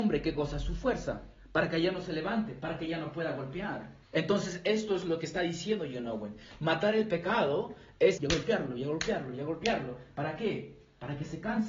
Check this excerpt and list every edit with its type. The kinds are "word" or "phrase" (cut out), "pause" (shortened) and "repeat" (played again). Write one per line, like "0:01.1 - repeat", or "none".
0:04.0 - pause
0:08.2 - phrase